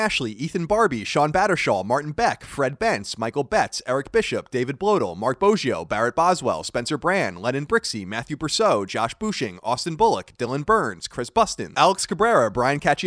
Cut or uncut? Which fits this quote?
uncut